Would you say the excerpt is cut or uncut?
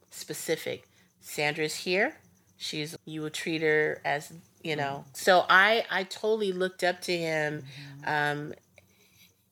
cut